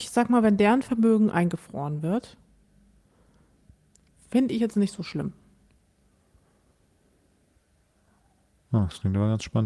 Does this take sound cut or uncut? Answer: uncut